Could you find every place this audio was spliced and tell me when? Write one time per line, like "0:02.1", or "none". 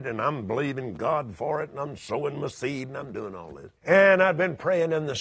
0:03.8